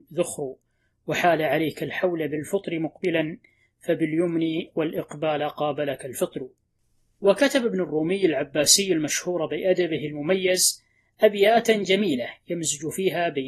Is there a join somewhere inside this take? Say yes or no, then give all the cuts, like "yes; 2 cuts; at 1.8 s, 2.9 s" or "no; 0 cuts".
no; 0 cuts